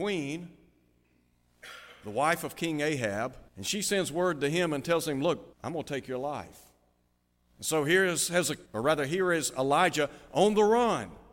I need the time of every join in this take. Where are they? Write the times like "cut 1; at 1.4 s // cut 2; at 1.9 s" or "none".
cut 1; at 3.5 s // cut 2; at 5.5 s // cut 3; at 8.7 s